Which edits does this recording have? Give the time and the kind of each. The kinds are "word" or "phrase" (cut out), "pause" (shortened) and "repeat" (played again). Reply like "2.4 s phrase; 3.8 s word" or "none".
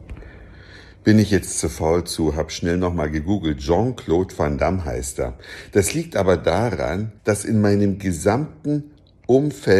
7.2 s pause